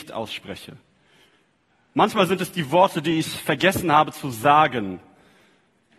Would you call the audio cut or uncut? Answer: uncut